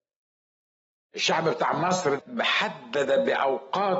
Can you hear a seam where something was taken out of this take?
yes; 1 cut; at 2.2 s

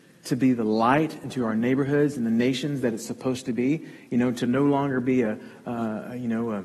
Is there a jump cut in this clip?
no; 0 cuts

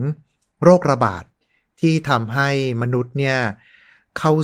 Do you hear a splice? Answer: no; 0 cuts

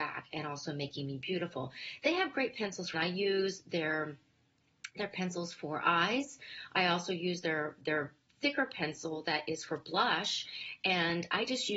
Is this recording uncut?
no; 1 cut; at 2.9 s

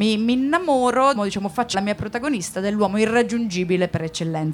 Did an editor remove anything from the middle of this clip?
yes; 2 cuts; at 1.2 s, 1.7 s

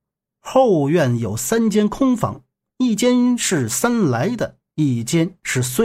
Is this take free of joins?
yes; 0 cuts

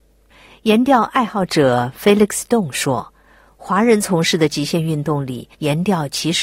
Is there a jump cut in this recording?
yes; 1 cut; at 5.5 s

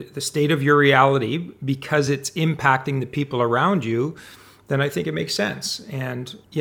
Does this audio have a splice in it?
no; 0 cuts

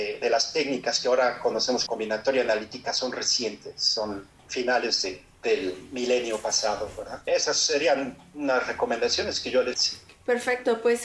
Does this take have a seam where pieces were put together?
yes; 3 cuts; at 1.9 s, 7.3 s, 9.7 s

